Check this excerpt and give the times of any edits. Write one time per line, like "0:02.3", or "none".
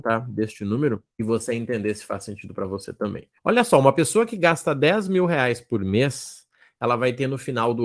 0:01.1
0:03.4